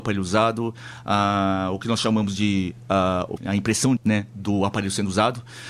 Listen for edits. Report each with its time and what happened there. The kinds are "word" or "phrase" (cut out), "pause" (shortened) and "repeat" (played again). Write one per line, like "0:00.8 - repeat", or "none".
0:03.4 - word
0:04.0 - word